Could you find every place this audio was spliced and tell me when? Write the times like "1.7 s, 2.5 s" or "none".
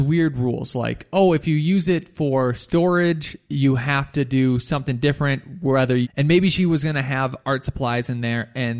6.0 s